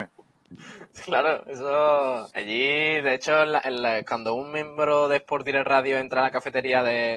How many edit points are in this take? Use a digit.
1